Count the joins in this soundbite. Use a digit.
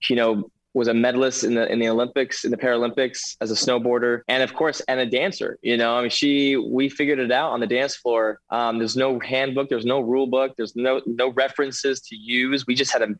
2